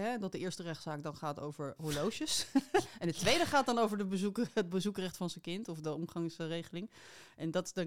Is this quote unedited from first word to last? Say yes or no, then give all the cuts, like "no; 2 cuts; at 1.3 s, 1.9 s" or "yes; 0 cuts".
yes; 0 cuts